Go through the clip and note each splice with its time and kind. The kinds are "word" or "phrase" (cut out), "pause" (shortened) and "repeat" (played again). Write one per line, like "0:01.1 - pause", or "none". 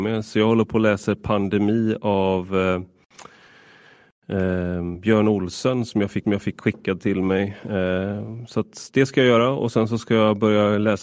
0:06.2 - repeat